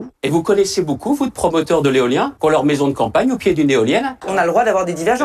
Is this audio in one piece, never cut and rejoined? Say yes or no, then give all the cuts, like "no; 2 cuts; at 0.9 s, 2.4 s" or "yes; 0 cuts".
yes; 0 cuts